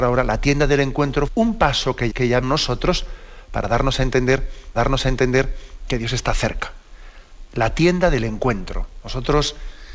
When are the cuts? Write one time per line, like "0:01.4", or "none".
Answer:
0:01.3
0:02.1
0:02.4
0:04.7

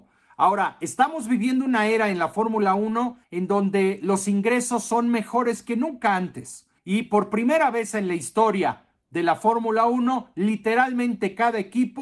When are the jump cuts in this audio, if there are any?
0:03.2
0:06.8

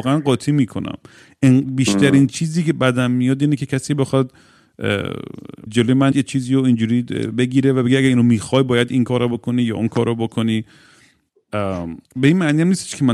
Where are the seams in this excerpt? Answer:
0:05.7
0:06.1
0:12.1

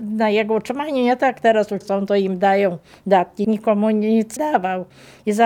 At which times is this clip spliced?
0:01.8
0:03.4
0:04.4

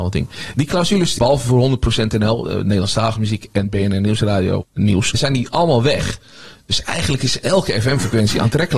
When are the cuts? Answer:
0:01.2

